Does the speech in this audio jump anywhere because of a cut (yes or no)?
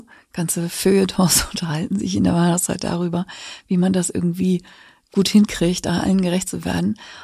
no